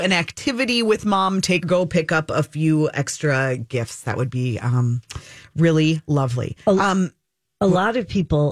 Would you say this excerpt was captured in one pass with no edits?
no; 1 cut; at 1.6 s

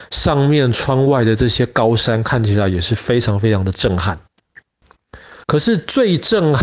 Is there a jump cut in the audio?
yes; 1 cut; at 5.4 s

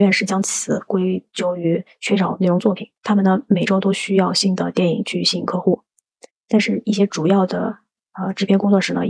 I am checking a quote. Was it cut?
yes; 1 cut; at 3.0 s

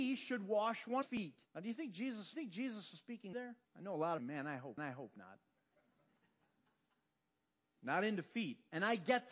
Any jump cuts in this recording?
yes; 7 cuts; at 1.0 s, 1.5 s, 2.3 s, 3.3 s, 3.6 s, 4.2 s, 4.8 s

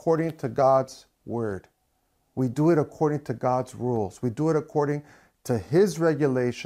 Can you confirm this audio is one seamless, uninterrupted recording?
yes; 0 cuts

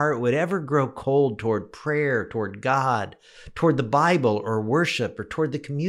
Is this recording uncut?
yes; 0 cuts

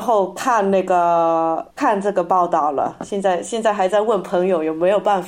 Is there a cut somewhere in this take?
yes; 1 cut; at 1.7 s

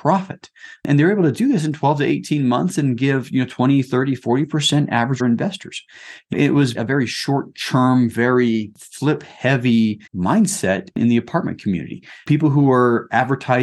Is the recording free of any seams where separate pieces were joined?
no; 4 cuts; at 5.2 s, 6.3 s, 6.7 s, 10.1 s

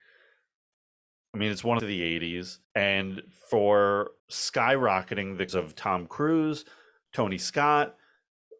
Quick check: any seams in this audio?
yes; 4 cuts; at 1.8 s, 2.6 s, 4.2 s, 5.5 s

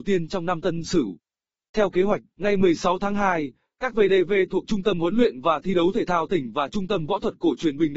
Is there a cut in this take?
no; 0 cuts

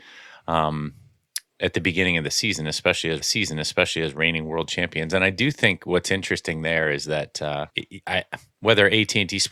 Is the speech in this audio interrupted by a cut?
yes; 2 cuts; at 3.2 s, 7.7 s

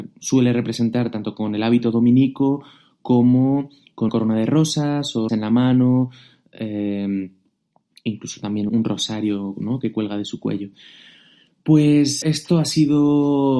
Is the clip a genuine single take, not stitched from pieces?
no; 4 cuts; at 4.1 s, 5.3 s, 8.7 s, 12.2 s

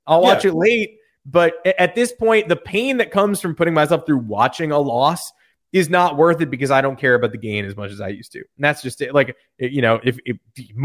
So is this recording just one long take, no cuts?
yes; 0 cuts

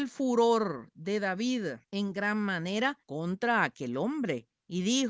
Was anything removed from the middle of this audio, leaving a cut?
yes; 2 cuts; at 1.8 s, 3.0 s

